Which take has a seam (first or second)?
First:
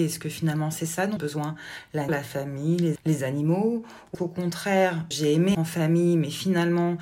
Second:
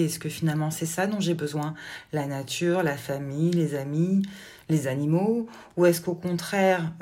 first